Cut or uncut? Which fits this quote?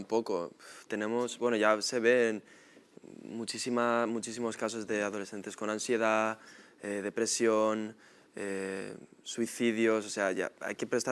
uncut